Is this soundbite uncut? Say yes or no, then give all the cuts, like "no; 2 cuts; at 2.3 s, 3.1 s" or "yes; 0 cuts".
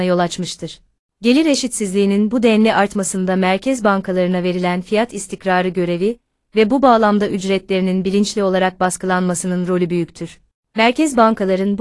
yes; 0 cuts